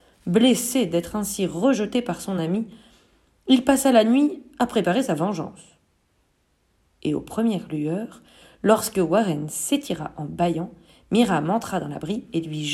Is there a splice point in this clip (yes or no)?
no